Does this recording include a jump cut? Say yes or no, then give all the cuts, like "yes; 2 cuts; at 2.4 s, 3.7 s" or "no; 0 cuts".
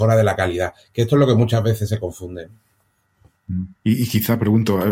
yes; 1 cut; at 3.7 s